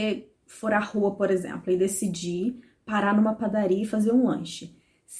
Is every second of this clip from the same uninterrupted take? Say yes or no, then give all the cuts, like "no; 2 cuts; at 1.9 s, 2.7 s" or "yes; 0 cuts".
yes; 0 cuts